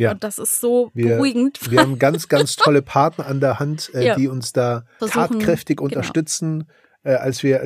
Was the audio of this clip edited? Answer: yes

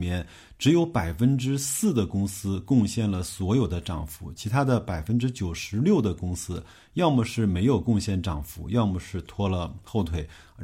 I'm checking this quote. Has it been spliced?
no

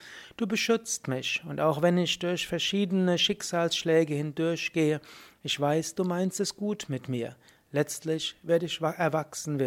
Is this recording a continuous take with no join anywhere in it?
yes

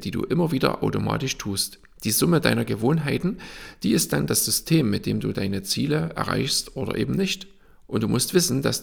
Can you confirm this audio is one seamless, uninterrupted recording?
yes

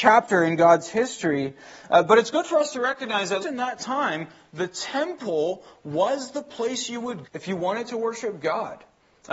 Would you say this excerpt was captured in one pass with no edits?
no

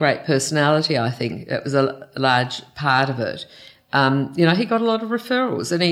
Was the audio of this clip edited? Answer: no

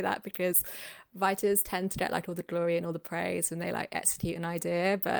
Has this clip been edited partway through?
no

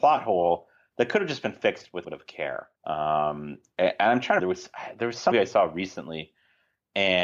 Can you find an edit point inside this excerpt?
yes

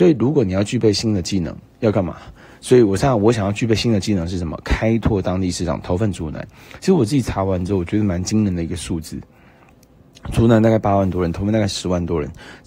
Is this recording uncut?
yes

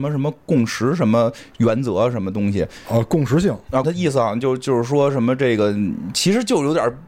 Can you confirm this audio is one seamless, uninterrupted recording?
no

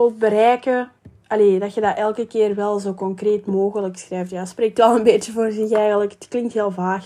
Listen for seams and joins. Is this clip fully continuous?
yes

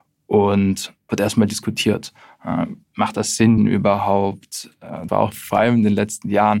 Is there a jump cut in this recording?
yes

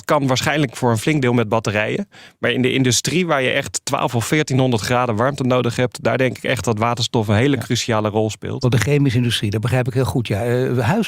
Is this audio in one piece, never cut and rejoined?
yes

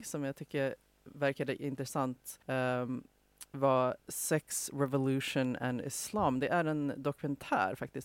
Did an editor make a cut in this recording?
yes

